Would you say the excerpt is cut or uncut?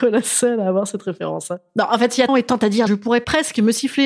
cut